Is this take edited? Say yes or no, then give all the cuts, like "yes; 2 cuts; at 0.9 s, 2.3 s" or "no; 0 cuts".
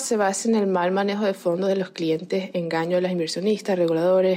no; 0 cuts